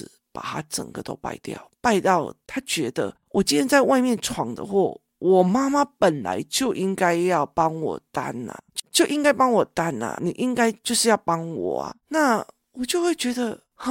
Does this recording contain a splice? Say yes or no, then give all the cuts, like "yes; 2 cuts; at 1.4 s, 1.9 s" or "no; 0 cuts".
yes; 1 cut; at 10.2 s